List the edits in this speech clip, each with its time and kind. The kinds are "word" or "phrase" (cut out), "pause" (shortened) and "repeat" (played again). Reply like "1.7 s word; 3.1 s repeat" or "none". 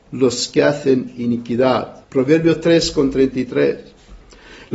2.0 s pause